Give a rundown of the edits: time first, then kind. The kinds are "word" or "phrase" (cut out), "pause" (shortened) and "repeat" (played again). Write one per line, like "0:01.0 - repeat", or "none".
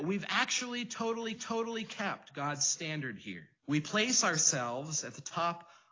0:01.4 - repeat
0:03.6 - pause